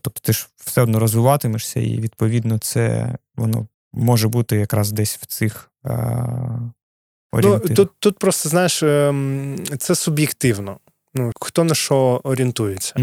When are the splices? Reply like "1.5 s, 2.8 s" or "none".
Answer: 3.7 s, 11.3 s